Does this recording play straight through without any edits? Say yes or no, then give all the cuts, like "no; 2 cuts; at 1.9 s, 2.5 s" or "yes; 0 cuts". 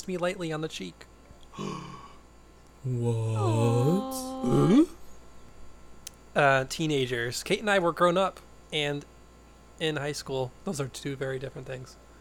no; 1 cut; at 10.6 s